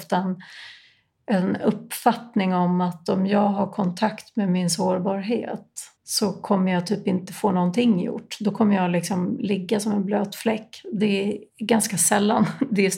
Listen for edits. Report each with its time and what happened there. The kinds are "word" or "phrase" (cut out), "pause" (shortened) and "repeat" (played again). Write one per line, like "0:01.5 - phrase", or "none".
0:06.0 - pause
0:11.5 - pause